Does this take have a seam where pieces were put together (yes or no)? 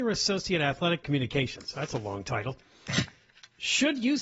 yes